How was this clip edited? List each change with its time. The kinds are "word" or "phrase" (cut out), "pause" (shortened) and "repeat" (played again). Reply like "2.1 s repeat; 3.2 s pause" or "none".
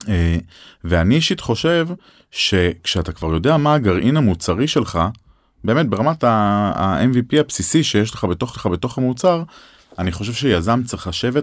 8.5 s repeat